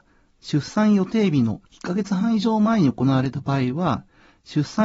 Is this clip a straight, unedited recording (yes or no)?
no